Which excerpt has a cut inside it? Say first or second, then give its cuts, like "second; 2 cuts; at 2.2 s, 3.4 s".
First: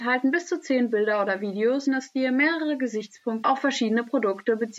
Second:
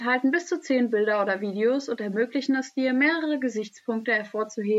first; 2 cuts; at 1.9 s, 3.4 s